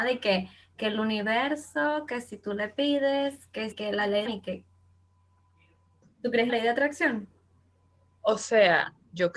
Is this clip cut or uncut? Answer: cut